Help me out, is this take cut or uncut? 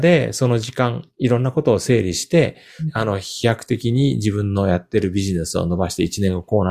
cut